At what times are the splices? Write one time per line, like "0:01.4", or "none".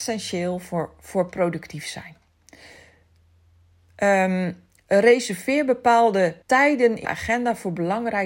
0:06.4
0:07.0